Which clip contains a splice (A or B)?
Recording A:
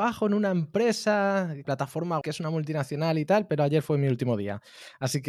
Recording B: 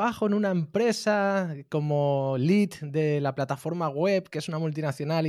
A